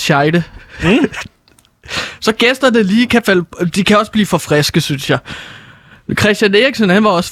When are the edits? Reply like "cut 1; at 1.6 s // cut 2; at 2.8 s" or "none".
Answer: none